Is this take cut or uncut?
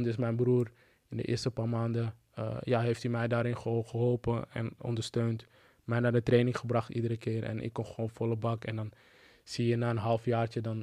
uncut